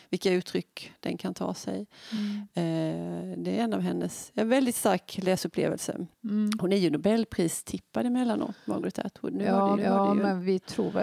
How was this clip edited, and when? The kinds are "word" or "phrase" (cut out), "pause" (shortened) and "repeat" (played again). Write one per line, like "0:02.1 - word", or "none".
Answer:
0:06.1 - pause
0:09.8 - repeat